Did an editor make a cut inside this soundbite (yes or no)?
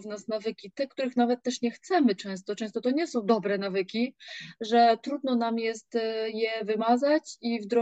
no